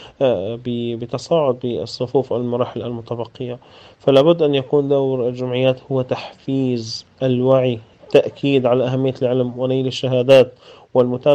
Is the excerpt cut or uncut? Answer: uncut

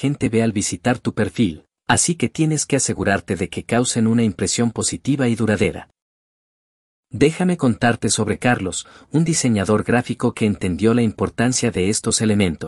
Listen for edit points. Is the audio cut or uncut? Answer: uncut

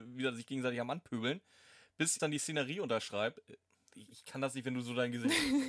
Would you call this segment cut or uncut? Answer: cut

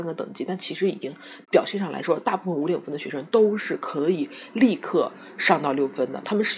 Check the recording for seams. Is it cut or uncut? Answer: cut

